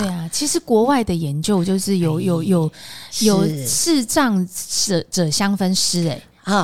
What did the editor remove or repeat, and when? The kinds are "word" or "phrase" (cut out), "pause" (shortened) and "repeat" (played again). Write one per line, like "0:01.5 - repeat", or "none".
none